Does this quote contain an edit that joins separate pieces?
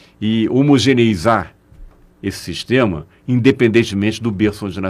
no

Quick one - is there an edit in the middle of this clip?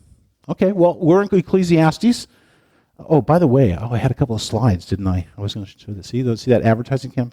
no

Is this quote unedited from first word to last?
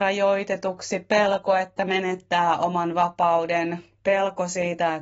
yes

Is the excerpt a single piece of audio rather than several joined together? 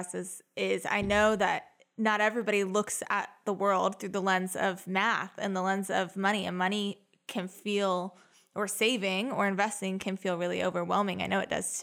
yes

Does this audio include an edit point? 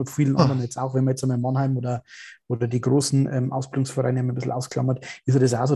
no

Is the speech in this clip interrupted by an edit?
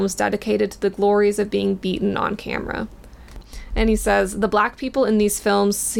no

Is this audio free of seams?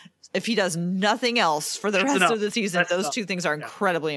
yes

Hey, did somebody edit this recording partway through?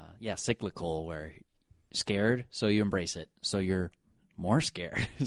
no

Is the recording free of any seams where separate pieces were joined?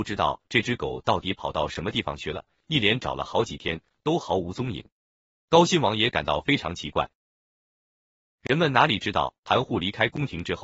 yes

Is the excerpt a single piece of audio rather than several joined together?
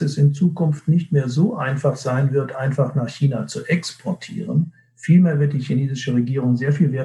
yes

